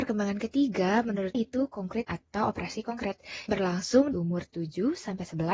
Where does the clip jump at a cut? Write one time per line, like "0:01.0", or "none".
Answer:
0:01.3
0:02.0
0:03.5
0:04.1